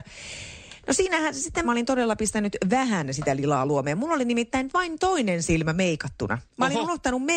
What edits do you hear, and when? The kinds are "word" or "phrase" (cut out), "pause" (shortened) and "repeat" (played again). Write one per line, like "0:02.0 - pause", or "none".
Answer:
0:01.6 - phrase
0:06.5 - pause